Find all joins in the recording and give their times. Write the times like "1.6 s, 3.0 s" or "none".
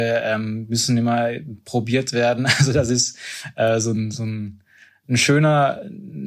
none